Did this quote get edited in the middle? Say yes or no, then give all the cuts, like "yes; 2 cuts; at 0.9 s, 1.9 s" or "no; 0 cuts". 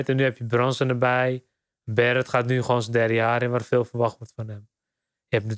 no; 0 cuts